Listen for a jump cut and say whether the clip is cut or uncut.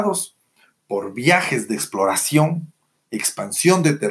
uncut